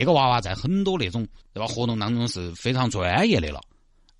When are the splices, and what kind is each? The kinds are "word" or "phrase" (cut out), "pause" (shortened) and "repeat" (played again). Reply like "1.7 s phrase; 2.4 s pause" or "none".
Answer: 1.4 s pause